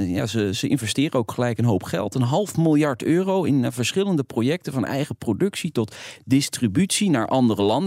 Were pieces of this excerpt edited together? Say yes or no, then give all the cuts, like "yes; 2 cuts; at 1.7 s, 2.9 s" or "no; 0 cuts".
no; 0 cuts